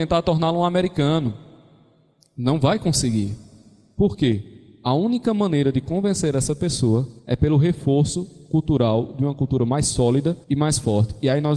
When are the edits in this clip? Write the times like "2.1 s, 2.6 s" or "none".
7.2 s, 10.4 s